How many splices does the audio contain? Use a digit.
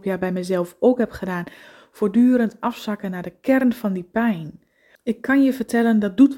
0